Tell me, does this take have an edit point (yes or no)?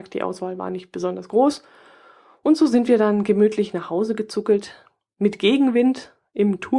no